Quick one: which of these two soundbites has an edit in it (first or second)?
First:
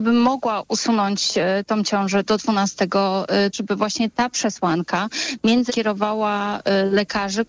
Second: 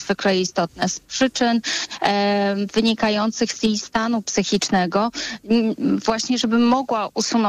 first